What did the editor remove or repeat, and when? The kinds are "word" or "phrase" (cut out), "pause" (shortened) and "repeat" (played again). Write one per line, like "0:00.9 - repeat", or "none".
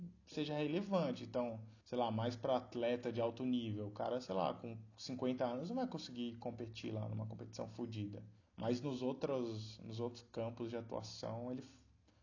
0:01.8 - pause
0:08.4 - pause